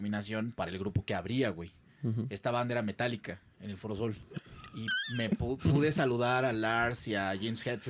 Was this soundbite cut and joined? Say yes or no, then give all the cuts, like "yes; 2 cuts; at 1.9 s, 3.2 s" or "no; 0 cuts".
no; 0 cuts